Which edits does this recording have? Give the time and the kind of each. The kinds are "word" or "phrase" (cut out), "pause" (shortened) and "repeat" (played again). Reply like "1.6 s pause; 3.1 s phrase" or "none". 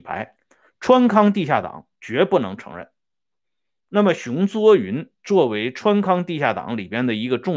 none